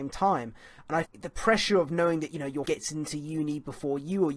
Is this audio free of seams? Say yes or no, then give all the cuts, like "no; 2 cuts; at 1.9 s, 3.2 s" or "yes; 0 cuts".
no; 2 cuts; at 1.0 s, 2.6 s